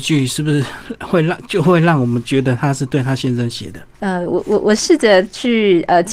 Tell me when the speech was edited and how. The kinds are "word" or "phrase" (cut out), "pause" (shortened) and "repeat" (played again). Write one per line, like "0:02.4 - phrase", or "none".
none